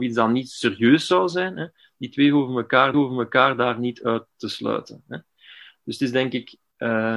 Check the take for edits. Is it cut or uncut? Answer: cut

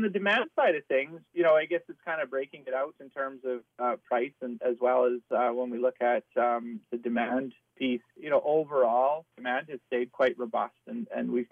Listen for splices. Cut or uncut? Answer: uncut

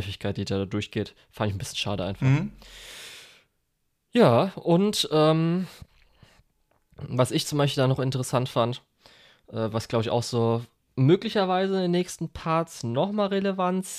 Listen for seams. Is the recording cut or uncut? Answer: uncut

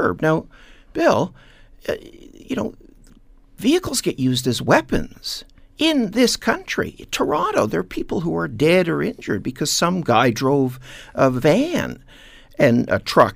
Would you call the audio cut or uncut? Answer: uncut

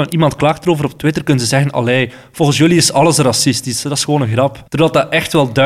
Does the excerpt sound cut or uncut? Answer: cut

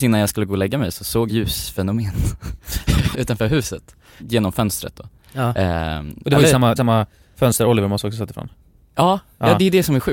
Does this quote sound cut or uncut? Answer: cut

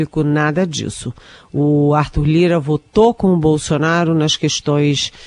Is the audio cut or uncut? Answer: uncut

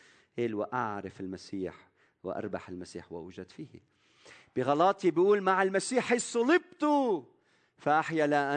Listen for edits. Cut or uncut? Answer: uncut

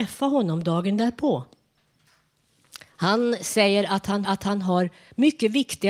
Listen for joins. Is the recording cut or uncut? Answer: cut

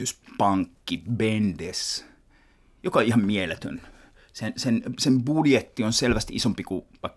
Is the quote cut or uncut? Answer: uncut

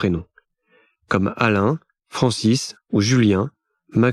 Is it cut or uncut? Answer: uncut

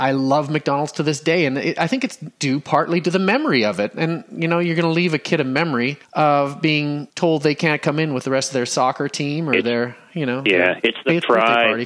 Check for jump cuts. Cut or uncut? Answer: cut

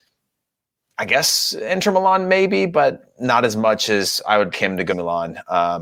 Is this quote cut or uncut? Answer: cut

